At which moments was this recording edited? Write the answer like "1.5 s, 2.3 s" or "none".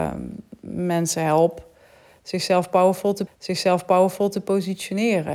3.3 s